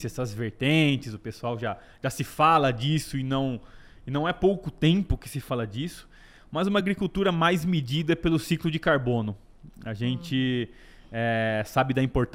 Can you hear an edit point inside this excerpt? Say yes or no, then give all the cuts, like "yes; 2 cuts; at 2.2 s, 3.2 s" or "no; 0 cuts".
no; 0 cuts